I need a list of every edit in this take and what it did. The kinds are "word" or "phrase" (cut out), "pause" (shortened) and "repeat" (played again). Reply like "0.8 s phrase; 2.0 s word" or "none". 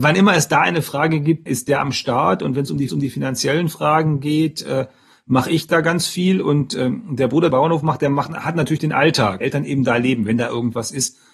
1.5 s word; 2.9 s repeat; 7.5 s phrase; 9.4 s phrase

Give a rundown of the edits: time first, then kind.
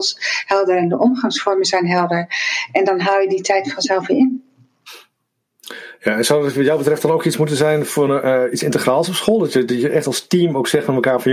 none

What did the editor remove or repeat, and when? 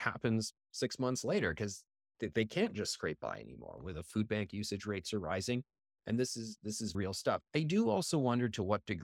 6.9 s word; 7.4 s pause

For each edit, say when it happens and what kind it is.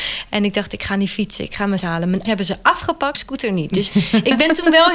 1.8 s word; 2.2 s word; 3.1 s word

